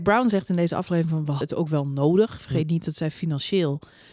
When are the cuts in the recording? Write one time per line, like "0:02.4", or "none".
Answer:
0:01.4